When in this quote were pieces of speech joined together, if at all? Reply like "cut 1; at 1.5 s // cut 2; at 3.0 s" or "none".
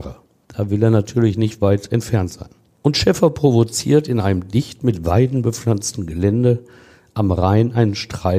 none